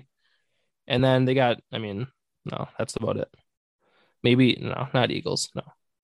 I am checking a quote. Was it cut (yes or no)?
no